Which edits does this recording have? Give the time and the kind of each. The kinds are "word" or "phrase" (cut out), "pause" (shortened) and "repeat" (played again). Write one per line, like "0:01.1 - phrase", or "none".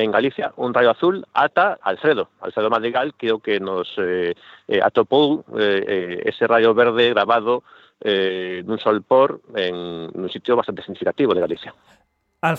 0:01.8 - word

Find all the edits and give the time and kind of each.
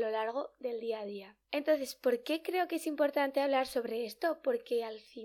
0:01.4 - pause

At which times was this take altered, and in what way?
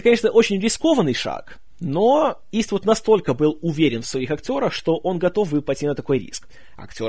none

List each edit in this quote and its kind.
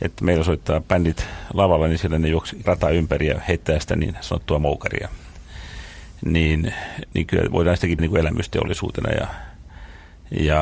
0:02.6 - word
0:08.0 - word

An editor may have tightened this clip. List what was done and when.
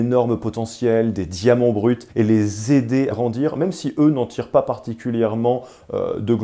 0:02.1 - pause
0:03.1 - word

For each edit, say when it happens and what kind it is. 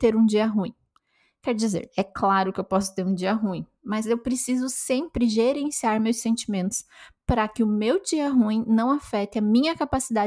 none

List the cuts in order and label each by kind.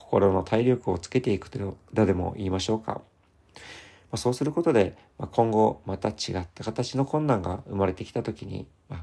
none

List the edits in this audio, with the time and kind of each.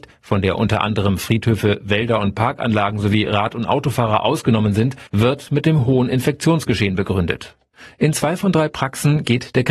0:05.1 - pause
0:07.7 - pause

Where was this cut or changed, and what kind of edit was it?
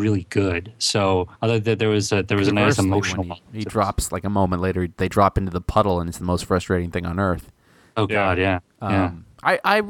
0:01.3 - pause

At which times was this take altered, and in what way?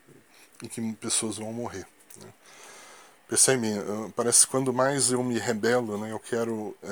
none

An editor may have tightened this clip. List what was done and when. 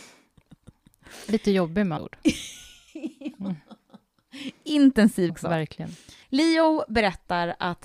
0:02.0 - word
0:05.3 - phrase
0:06.2 - pause

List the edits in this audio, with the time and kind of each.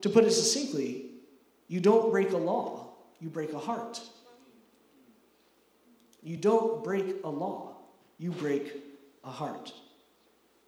none

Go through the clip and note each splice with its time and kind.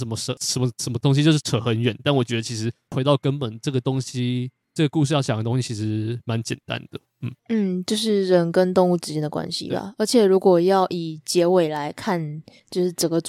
0:07.4 - pause

